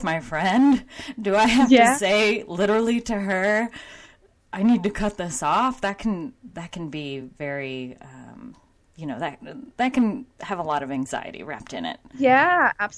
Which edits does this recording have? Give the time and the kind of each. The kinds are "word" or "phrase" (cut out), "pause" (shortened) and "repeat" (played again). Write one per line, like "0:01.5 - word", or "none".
none